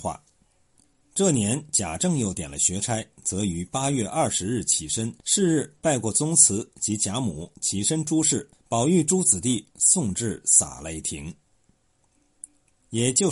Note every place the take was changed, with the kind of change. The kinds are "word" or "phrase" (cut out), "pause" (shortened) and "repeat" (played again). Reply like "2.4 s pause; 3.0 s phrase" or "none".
5.2 s pause; 8.5 s pause